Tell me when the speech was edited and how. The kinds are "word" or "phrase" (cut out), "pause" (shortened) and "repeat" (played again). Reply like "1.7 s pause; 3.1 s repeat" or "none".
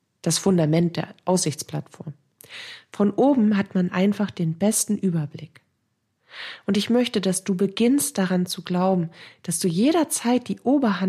none